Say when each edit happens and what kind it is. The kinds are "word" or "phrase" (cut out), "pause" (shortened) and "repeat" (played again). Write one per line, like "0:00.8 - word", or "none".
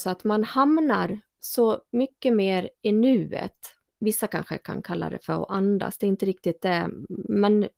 0:01.3 - pause
0:03.9 - pause